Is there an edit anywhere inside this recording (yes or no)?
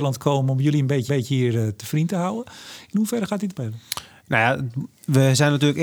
yes